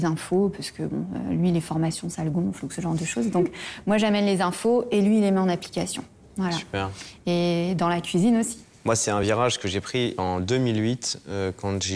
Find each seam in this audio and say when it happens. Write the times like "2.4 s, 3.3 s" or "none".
none